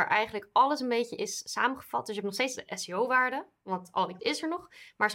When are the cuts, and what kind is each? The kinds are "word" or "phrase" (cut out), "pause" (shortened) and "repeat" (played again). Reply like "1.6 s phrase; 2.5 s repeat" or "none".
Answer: 4.2 s word